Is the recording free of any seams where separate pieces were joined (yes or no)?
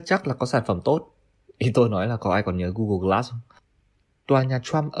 yes